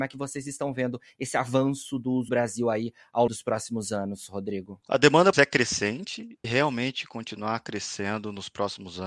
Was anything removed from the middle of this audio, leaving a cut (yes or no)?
yes